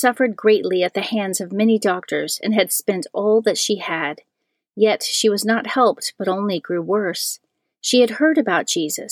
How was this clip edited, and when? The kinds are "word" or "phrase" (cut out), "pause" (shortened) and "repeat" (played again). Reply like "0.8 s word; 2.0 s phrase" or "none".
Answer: none